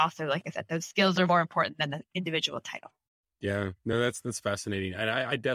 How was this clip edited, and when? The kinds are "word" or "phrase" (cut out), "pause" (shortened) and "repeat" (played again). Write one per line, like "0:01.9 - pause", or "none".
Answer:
none